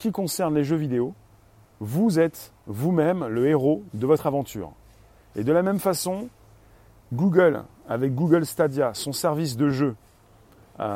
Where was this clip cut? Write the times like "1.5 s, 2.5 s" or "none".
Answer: none